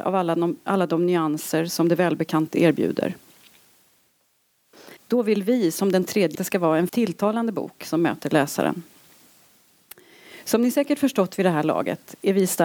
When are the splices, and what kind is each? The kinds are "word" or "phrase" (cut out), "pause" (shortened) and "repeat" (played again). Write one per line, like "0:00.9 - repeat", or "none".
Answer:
0:02.5 - word
0:05.0 - pause
0:06.3 - phrase
0:06.9 - word